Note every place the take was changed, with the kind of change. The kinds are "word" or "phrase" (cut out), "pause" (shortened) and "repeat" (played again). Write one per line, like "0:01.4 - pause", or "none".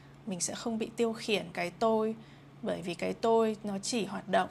0:01.5 - word